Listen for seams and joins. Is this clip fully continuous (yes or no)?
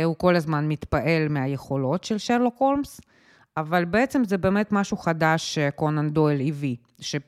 yes